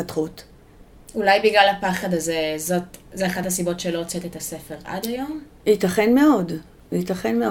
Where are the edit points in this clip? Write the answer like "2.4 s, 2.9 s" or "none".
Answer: none